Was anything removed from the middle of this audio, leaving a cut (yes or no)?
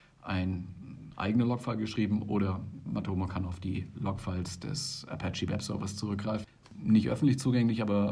yes